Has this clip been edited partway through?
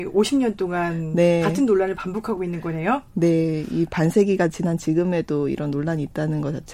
no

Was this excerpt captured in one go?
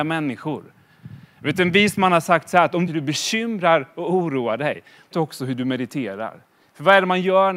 no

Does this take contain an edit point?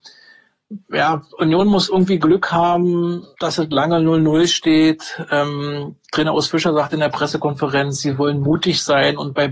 yes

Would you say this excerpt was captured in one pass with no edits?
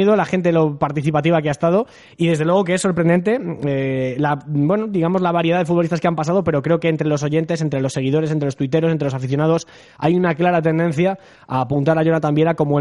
yes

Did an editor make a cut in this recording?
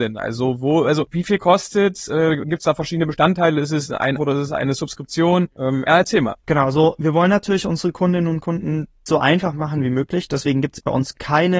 yes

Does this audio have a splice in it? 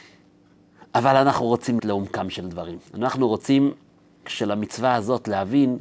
yes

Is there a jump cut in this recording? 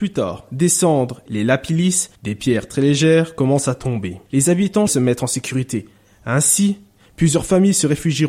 yes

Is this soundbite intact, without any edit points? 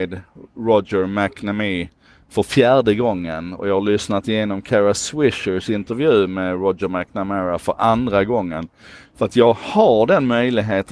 yes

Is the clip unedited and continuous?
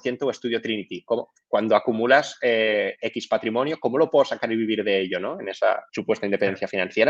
no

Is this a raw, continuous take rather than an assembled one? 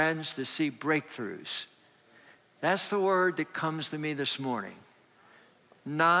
yes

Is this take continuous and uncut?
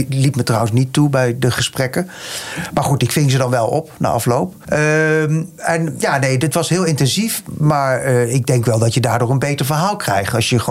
yes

